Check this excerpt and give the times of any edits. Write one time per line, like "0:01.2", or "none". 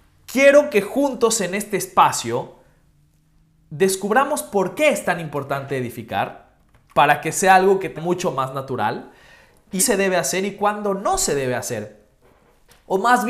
0:08.0
0:09.8